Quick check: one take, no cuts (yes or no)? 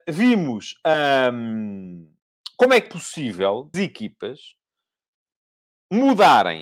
no